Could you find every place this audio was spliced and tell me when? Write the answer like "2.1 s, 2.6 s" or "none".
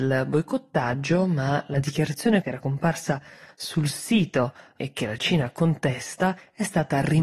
2.4 s